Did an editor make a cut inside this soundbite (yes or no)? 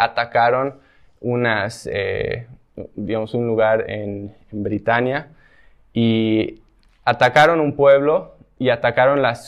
no